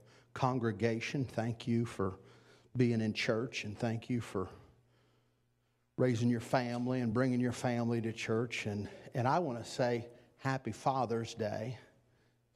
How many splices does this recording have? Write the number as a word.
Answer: zero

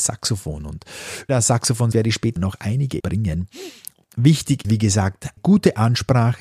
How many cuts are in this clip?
six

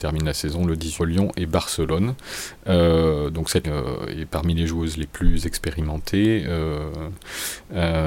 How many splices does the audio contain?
two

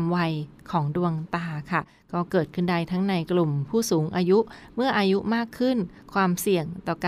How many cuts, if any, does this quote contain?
zero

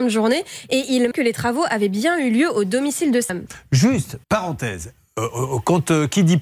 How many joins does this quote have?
three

